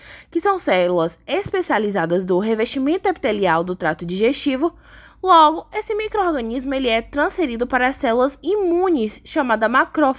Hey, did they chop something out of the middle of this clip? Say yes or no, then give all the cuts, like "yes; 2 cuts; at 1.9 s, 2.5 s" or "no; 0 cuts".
no; 0 cuts